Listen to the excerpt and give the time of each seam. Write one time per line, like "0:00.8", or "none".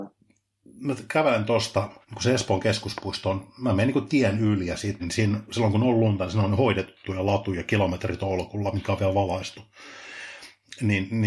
0:02.0
0:05.0